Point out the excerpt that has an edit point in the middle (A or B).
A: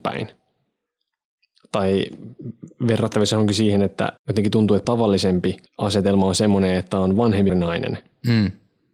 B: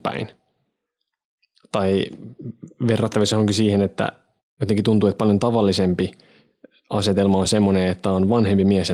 A